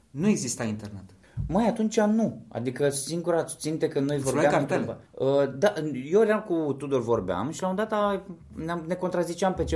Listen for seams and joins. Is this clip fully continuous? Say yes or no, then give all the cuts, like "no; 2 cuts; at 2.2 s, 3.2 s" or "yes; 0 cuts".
yes; 0 cuts